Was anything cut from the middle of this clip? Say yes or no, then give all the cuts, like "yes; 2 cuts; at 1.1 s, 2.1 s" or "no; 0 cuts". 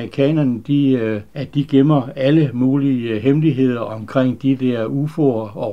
yes; 1 cut; at 1.3 s